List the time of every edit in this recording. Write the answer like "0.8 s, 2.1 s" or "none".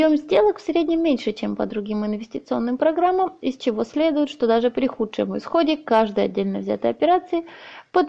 none